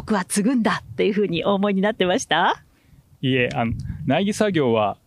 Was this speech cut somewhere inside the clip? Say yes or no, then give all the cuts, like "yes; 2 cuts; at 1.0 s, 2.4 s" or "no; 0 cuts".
no; 0 cuts